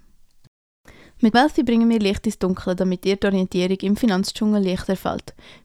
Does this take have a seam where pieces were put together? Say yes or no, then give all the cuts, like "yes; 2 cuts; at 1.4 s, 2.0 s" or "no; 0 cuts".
yes; 1 cut; at 1.3 s